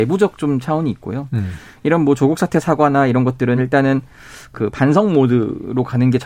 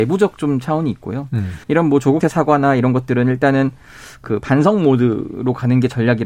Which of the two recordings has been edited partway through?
second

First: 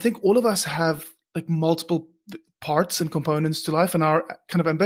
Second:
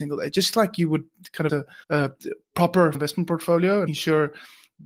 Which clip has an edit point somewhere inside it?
second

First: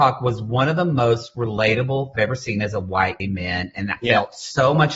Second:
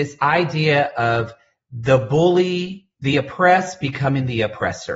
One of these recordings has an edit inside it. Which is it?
first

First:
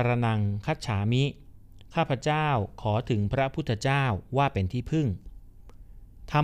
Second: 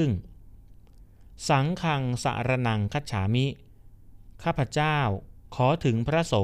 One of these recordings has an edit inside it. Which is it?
first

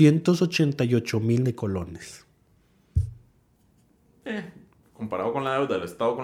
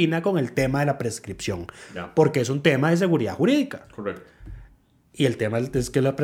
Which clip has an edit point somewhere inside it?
first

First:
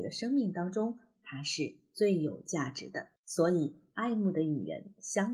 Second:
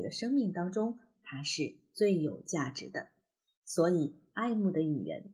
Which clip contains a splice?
first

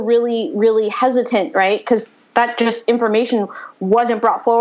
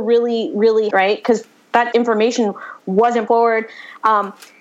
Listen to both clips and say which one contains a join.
second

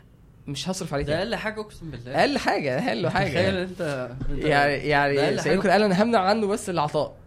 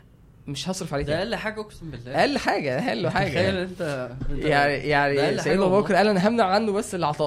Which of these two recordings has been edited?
first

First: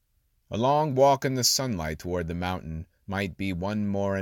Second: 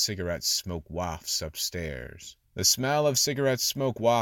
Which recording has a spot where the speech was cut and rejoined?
second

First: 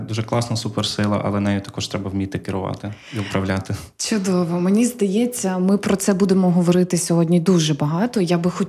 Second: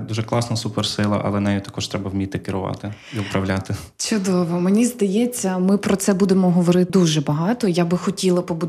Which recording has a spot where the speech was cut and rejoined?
second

